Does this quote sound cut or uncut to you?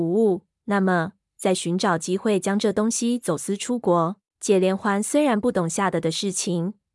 cut